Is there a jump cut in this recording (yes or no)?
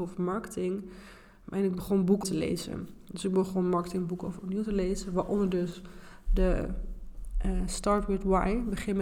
yes